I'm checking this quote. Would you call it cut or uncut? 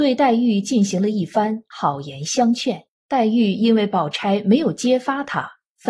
cut